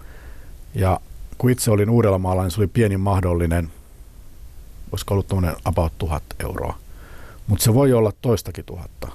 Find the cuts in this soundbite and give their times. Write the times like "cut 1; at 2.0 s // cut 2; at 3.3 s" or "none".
none